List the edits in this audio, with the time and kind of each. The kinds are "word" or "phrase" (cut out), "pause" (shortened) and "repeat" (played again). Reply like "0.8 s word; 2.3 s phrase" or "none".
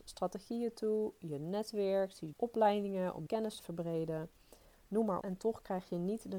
2.3 s word; 3.3 s word; 3.6 s word; 5.2 s word